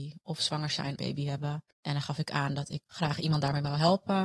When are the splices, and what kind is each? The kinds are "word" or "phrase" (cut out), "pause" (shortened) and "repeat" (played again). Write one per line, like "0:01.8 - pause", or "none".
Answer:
0:01.0 - phrase
0:01.7 - pause
0:02.9 - word

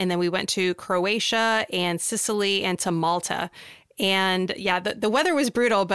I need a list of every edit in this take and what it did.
none

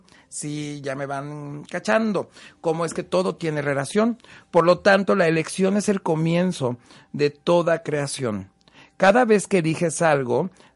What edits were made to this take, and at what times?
none

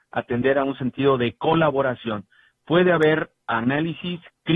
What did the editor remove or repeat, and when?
none

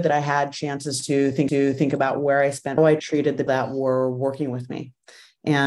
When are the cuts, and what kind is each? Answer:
0:01.5 - repeat
0:02.8 - phrase
0:03.5 - word

